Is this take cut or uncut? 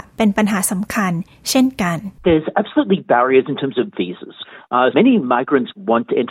cut